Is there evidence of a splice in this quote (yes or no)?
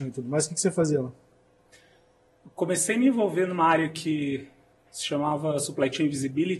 no